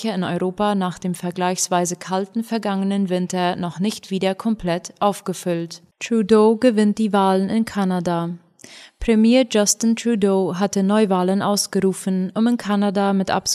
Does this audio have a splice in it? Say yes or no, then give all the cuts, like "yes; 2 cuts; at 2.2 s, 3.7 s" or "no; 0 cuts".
yes; 1 cut; at 5.9 s